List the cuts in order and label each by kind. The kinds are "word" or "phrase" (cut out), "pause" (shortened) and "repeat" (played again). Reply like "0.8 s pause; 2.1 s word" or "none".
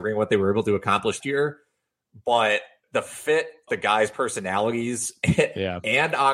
1.2 s word; 2.8 s word; 3.7 s word

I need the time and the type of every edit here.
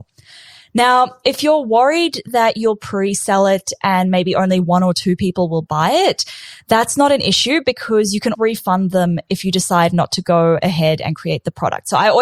8.3 s word

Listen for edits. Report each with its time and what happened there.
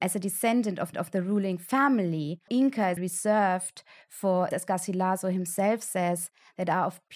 0.9 s repeat; 2.5 s word; 3.0 s word; 4.5 s word

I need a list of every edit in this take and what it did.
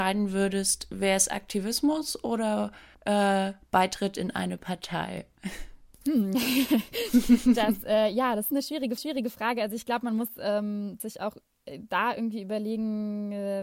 2.9 s pause; 5.9 s pause; 9.0 s repeat

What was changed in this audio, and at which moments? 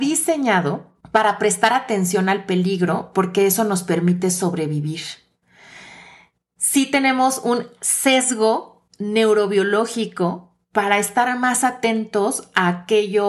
1.0 s pause; 8.9 s pause

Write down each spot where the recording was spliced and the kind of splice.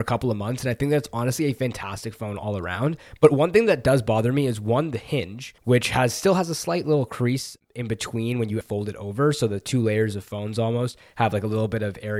5.6 s pause; 8.6 s word

